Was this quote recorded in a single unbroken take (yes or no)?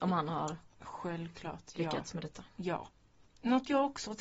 yes